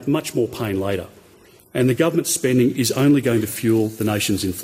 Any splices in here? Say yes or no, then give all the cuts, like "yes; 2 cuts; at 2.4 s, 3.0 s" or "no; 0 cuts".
no; 0 cuts